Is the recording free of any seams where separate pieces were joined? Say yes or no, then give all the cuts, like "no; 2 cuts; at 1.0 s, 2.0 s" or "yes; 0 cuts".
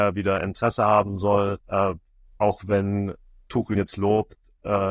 no; 2 cuts; at 1.6 s, 3.8 s